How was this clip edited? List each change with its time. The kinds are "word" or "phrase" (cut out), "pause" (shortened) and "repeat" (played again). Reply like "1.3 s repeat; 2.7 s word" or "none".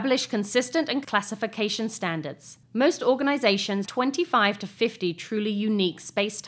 1.0 s word; 3.9 s word